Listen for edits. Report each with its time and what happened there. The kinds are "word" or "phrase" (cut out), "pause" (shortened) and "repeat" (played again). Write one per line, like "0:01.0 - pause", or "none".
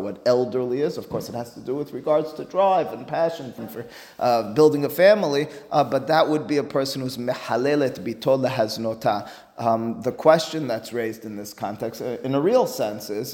0:03.6 - word